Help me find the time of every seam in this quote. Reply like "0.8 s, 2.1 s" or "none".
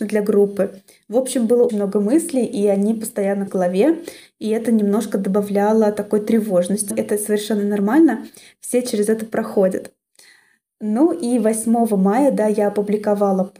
1.7 s, 3.5 s, 6.9 s